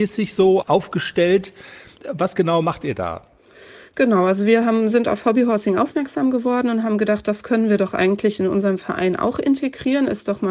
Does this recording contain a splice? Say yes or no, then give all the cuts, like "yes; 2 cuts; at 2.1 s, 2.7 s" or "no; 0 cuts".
yes; 1 cut; at 1.9 s